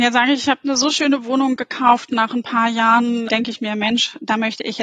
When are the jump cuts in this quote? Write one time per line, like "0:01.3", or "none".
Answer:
0:03.3